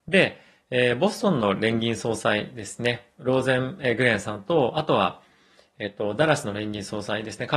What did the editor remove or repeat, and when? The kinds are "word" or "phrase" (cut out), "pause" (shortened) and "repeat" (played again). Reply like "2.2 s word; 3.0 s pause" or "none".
none